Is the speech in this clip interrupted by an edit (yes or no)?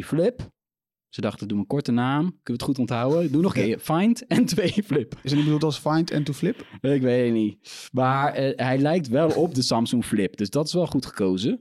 no